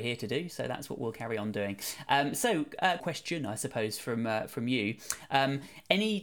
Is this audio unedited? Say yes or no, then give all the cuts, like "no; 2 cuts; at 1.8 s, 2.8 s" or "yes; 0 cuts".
no; 1 cut; at 3.0 s